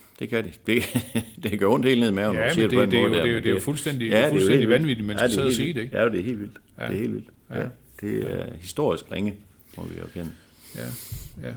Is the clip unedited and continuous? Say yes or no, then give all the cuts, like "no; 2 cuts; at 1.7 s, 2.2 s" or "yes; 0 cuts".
yes; 0 cuts